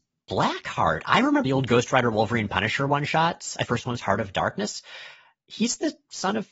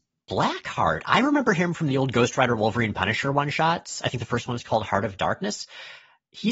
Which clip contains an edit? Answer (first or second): first